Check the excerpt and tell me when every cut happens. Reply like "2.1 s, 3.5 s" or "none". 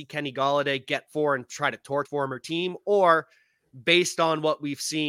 1.1 s, 2.1 s